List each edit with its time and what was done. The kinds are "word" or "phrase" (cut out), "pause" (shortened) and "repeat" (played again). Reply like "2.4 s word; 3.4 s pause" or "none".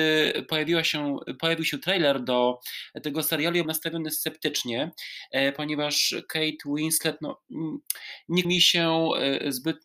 3.6 s word; 8.4 s word